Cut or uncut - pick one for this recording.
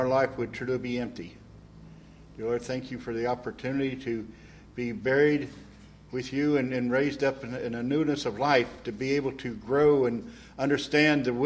uncut